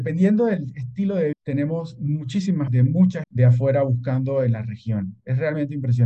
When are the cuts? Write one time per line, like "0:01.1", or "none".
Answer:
0:01.3
0:02.7
0:03.2